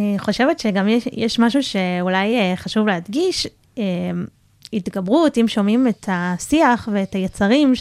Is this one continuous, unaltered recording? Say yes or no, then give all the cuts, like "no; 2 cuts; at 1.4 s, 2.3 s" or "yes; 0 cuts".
yes; 0 cuts